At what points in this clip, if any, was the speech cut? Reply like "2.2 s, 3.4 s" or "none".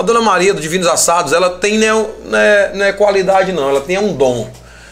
none